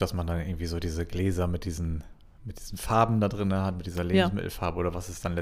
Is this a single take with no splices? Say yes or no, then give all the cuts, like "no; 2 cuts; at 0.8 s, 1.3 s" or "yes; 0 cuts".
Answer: yes; 0 cuts